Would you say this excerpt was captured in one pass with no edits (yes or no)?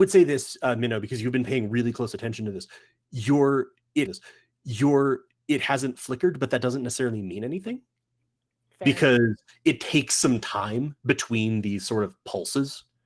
no